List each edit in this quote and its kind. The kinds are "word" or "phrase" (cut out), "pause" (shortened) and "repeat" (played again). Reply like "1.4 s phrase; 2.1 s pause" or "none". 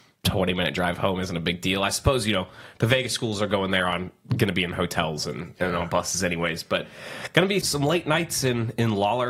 7.6 s word